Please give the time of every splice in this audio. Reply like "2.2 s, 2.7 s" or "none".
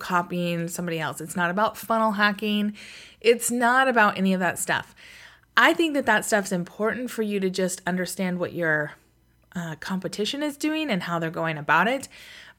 none